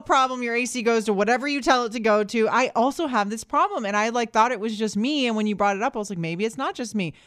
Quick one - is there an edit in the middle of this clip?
no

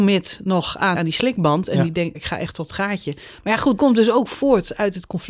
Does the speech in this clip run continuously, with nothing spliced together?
no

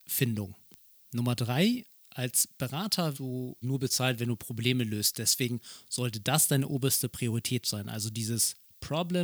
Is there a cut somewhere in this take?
yes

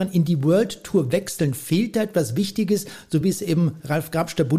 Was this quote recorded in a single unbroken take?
yes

